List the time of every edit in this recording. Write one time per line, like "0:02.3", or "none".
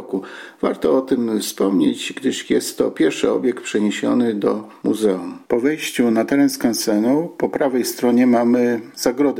none